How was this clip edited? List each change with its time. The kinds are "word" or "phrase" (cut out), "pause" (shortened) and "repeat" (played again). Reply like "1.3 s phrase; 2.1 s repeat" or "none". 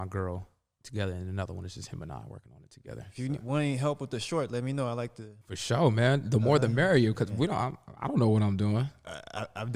5.4 s pause